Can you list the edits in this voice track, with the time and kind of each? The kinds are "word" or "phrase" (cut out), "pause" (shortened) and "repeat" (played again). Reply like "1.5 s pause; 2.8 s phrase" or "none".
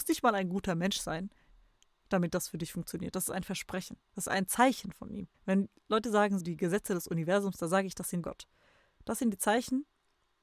5.3 s pause; 6.4 s word; 8.2 s phrase